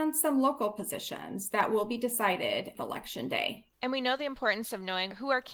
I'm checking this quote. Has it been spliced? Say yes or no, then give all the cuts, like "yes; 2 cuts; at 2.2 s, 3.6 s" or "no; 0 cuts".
no; 0 cuts